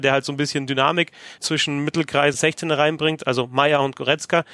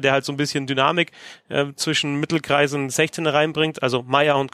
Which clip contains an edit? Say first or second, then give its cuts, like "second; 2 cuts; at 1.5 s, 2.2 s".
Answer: first; 2 cuts; at 1.4 s, 2.3 s